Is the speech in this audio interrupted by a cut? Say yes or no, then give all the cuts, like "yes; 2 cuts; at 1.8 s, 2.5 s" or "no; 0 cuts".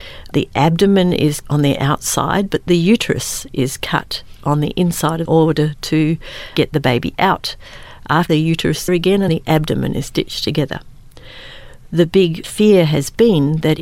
yes; 6 cuts; at 1.4 s, 2.7 s, 5.3 s, 8.3 s, 8.9 s, 9.3 s